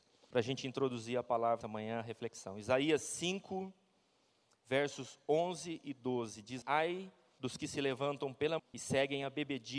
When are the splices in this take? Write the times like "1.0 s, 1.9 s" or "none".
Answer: 1.6 s, 6.6 s, 8.6 s